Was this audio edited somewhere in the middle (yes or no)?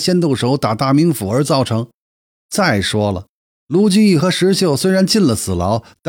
no